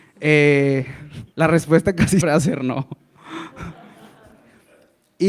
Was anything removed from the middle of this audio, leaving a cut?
yes; 2 cuts; at 1.3 s, 2.2 s

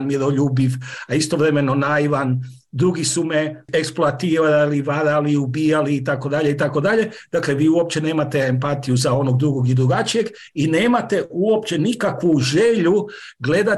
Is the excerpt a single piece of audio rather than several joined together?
yes; 0 cuts

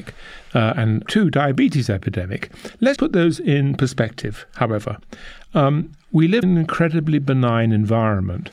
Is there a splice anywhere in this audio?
yes; 3 cuts; at 1.0 s, 3.0 s, 6.4 s

